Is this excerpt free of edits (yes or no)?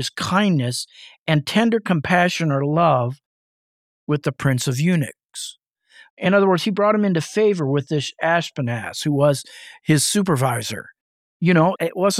yes